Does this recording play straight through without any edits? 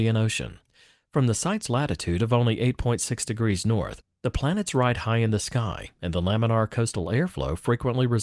yes; 0 cuts

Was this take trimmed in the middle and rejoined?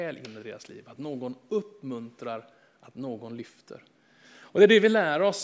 no; 0 cuts

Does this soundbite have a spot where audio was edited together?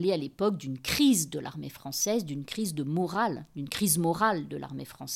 no; 0 cuts

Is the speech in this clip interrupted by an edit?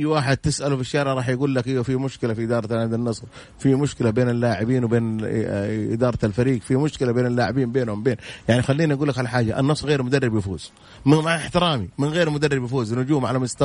yes; 1 cut; at 9.8 s

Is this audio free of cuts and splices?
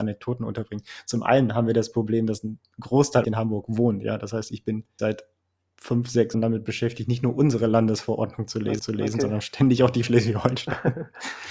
no; 5 cuts; at 3.2 s, 5.0 s, 6.3 s, 8.8 s, 10.0 s

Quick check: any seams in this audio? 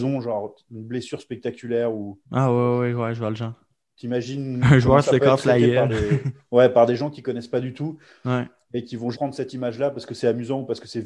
yes; 2 cuts; at 2.2 s, 9.1 s

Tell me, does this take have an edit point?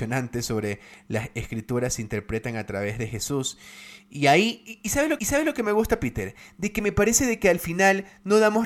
yes; 1 cut; at 5.2 s

